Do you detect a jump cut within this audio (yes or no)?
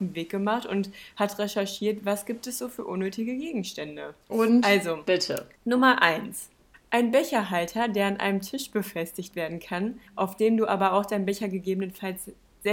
yes